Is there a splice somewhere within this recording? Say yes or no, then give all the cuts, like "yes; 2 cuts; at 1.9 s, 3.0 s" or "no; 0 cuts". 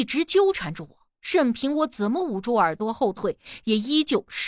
yes; 1 cut; at 1.1 s